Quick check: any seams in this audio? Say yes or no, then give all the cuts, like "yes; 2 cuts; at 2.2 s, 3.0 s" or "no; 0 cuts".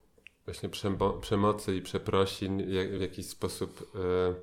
no; 0 cuts